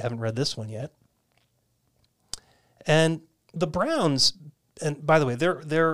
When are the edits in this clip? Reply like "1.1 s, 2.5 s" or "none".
none